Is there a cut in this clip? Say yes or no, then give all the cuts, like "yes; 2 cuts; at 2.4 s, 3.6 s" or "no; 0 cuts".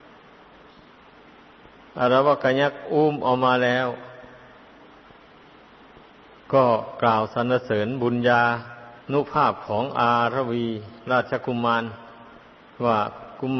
yes; 1 cut; at 9.0 s